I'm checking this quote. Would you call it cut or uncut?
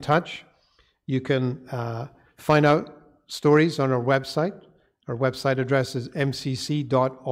uncut